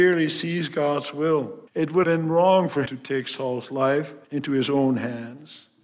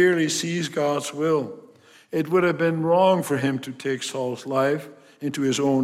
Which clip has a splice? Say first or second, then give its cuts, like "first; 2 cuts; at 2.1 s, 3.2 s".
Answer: first; 4 cuts; at 1.7 s, 2.0 s, 2.9 s, 4.2 s